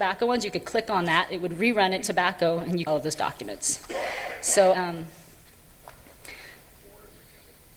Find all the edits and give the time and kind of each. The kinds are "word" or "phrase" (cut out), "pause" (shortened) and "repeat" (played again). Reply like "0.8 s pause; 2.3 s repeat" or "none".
2.0 s word; 2.9 s phrase; 4.7 s word